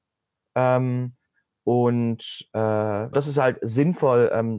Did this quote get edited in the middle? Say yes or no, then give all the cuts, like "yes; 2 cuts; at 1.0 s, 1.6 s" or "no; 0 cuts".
yes; 1 cut; at 3.1 s